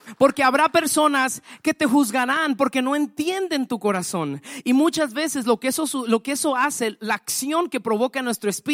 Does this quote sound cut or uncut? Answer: uncut